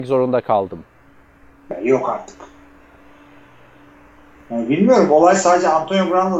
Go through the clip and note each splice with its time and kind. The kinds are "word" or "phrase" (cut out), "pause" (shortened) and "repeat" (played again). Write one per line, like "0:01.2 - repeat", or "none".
none

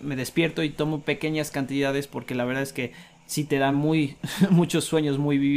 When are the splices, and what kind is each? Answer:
none

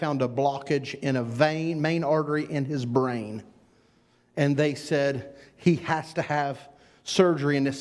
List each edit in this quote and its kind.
none

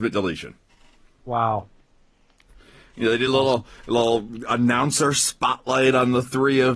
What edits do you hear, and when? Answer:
none

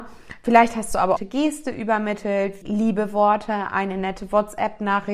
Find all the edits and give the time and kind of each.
0:01.2 - phrase
0:02.6 - word

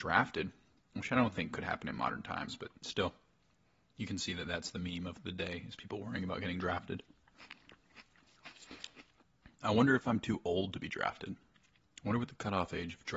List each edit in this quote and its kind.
none

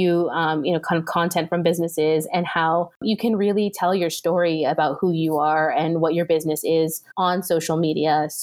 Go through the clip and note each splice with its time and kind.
0:07.1 - pause

